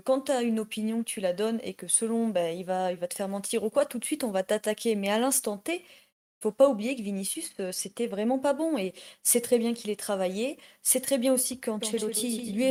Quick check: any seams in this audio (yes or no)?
no